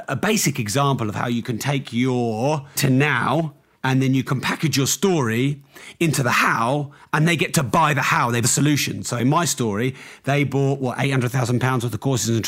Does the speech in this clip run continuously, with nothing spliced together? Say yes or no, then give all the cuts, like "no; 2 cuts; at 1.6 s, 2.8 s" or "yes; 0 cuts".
no; 3 cuts; at 2.8 s, 3.7 s, 8.4 s